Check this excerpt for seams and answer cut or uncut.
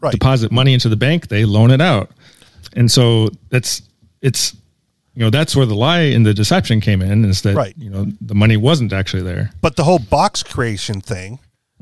uncut